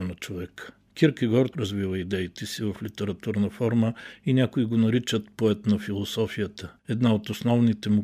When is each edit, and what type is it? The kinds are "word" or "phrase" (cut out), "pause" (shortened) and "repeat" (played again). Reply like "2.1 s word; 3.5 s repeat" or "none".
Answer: 1.5 s word; 6.8 s pause